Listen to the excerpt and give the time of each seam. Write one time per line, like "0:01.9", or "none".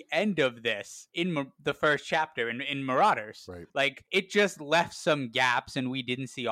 none